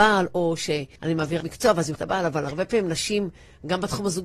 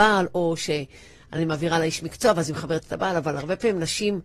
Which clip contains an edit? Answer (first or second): first